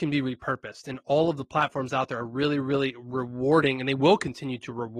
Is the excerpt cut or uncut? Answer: uncut